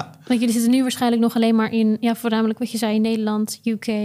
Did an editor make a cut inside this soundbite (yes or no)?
no